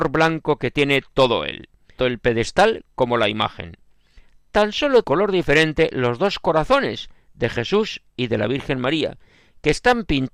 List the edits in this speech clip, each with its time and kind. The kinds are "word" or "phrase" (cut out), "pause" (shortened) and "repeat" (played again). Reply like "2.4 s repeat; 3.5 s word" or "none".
2.0 s word; 5.0 s word